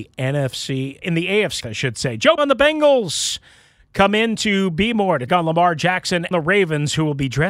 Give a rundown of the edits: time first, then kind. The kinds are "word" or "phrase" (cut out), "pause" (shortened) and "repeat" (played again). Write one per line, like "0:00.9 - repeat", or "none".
0:01.0 - word
0:01.6 - word
0:02.4 - word
0:05.3 - word
0:06.3 - word